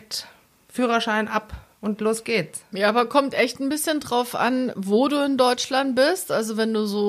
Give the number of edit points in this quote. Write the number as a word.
zero